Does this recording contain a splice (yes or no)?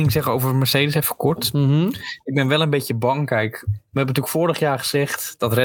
no